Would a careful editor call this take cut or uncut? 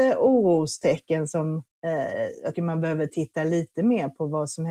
cut